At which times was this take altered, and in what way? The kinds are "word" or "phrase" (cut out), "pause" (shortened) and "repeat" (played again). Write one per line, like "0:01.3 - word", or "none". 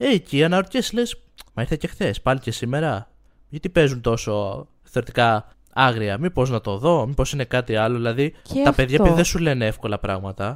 0:01.5 - pause
0:05.5 - pause
0:08.4 - pause